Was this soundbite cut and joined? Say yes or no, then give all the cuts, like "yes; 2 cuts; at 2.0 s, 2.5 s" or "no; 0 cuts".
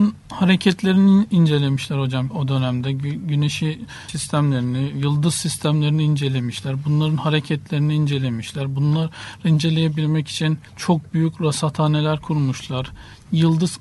yes; 3 cuts; at 2.3 s, 4.1 s, 10.7 s